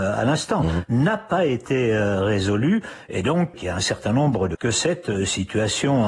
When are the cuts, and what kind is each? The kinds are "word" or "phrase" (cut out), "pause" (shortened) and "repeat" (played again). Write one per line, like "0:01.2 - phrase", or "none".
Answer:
0:03.5 - word
0:04.5 - word